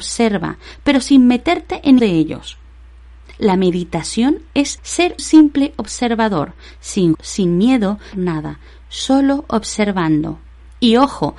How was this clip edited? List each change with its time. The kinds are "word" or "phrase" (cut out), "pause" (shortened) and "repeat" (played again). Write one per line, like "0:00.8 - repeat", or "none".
0:02.0 - word
0:04.8 - word
0:05.2 - word
0:07.1 - word
0:08.1 - phrase

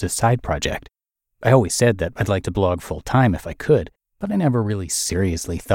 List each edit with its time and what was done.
0:04.0 - pause

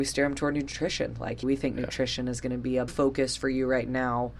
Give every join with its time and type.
0:01.4 - word
0:02.9 - word

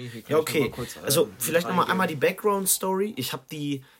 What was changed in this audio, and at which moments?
none

